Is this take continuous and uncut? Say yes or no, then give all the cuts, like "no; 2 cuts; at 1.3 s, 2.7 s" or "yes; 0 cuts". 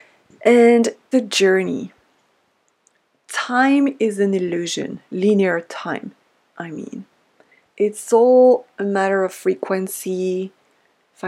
no; 1 cut; at 1.1 s